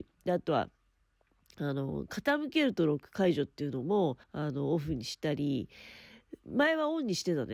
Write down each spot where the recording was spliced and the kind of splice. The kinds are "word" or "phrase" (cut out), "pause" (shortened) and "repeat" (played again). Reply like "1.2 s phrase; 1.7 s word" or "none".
4.2 s pause